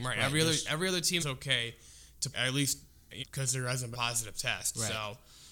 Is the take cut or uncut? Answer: cut